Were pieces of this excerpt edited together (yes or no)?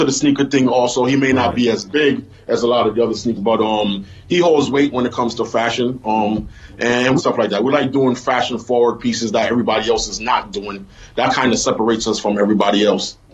yes